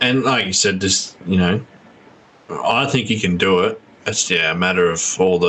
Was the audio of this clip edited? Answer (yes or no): yes